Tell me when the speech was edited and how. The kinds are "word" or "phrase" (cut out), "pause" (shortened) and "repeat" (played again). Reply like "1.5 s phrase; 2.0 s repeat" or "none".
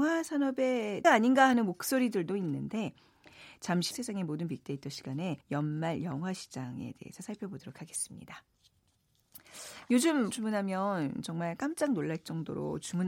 1.0 s word; 3.9 s word; 5.4 s pause; 10.3 s word